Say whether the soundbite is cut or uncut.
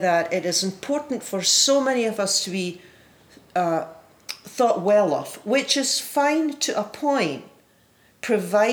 uncut